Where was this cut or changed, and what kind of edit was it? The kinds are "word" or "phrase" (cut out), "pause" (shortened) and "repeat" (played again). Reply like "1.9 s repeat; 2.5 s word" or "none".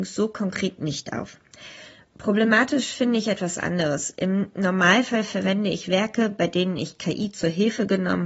none